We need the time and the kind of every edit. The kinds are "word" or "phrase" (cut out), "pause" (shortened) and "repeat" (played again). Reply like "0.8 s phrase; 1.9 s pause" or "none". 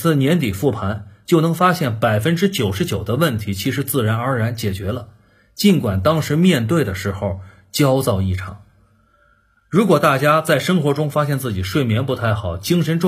none